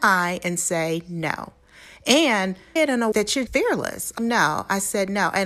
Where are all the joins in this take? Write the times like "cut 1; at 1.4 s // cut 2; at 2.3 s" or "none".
cut 1; at 2.8 s // cut 2; at 3.1 s // cut 3; at 3.5 s // cut 4; at 4.2 s

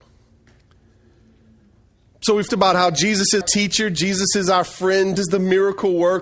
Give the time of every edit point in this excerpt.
cut 1; at 2.5 s // cut 2; at 3.4 s // cut 3; at 5.2 s

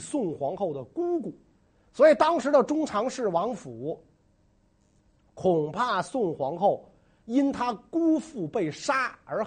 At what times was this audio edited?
none

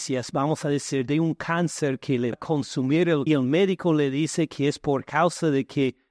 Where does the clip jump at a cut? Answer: cut 1; at 2.3 s // cut 2; at 3.3 s

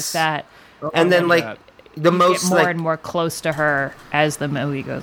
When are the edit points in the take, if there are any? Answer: none

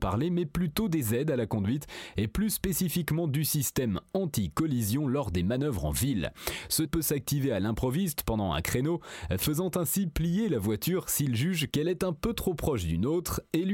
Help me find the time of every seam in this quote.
cut 1; at 6.9 s

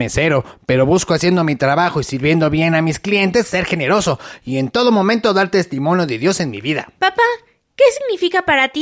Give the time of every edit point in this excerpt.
cut 1; at 7.0 s

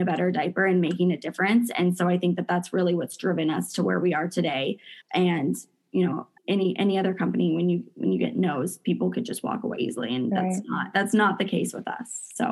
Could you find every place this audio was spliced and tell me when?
cut 1; at 5.0 s // cut 2; at 6.4 s // cut 3; at 9.8 s

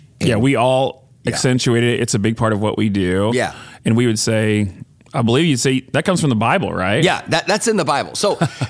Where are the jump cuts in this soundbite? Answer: none

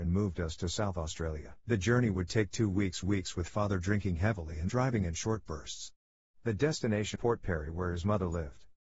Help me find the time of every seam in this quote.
cut 1; at 1.6 s // cut 2; at 3.0 s // cut 3; at 4.7 s // cut 4; at 7.1 s

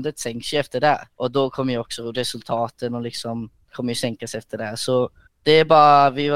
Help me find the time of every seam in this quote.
cut 1; at 1.1 s // cut 2; at 3.7 s // cut 3; at 5.3 s

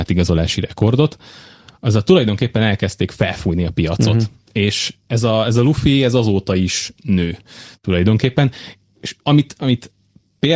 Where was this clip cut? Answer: cut 1; at 9.2 s

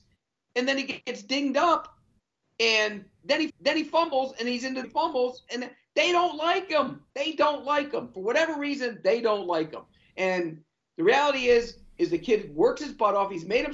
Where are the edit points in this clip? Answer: cut 1; at 3.5 s // cut 2; at 4.8 s // cut 3; at 7.1 s

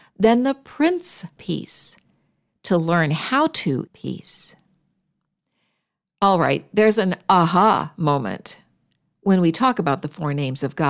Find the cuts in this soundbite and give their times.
cut 1; at 1.4 s // cut 2; at 3.9 s

